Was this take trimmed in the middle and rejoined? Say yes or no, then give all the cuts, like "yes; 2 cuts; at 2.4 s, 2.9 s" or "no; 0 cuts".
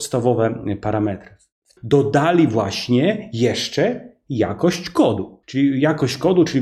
yes; 2 cuts; at 1.8 s, 5.4 s